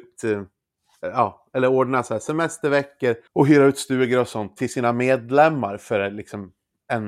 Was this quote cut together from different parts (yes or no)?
yes